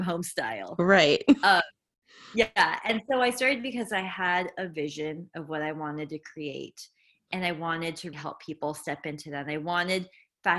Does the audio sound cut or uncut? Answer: cut